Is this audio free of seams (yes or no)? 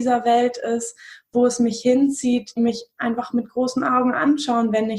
no